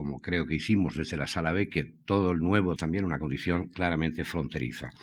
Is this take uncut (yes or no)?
no